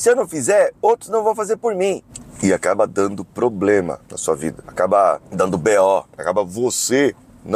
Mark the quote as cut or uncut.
cut